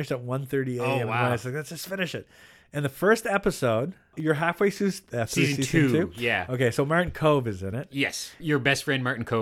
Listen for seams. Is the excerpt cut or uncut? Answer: uncut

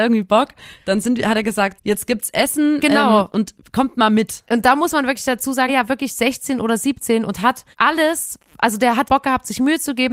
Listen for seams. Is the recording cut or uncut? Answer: cut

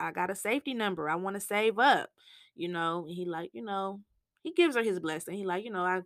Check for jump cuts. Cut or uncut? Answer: uncut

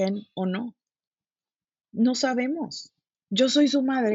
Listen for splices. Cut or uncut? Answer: cut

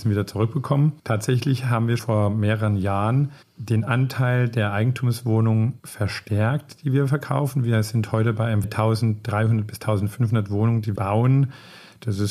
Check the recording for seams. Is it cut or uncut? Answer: cut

